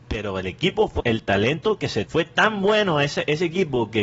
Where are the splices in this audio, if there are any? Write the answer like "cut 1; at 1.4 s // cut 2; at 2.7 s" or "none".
cut 1; at 1.0 s // cut 2; at 2.1 s